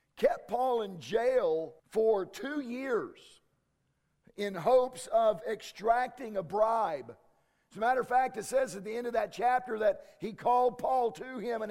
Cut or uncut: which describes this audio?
cut